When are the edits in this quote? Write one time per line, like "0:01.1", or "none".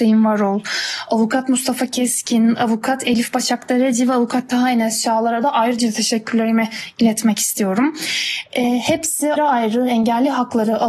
0:09.4